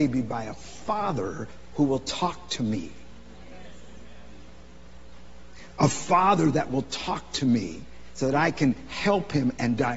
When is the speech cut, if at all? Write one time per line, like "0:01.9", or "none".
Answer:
none

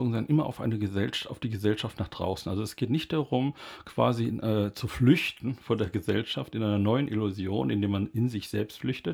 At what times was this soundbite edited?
none

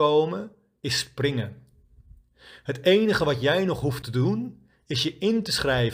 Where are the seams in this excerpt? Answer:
none

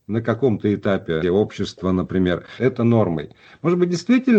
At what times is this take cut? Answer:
0:01.2
0:02.6

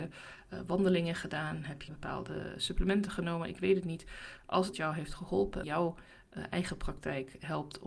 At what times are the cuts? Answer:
0:01.9
0:04.7
0:05.6

